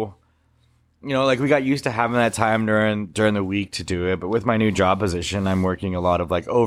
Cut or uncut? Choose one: uncut